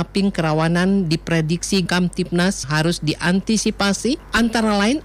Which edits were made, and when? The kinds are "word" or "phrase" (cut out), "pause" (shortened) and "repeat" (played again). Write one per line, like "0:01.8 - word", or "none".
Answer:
0:01.9 - word
0:02.6 - word